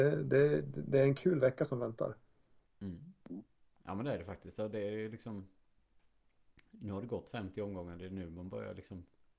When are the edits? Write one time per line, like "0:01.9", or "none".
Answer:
none